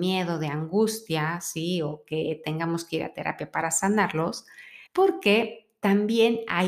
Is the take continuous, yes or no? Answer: no